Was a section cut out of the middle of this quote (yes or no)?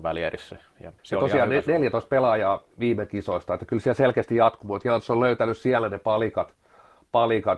yes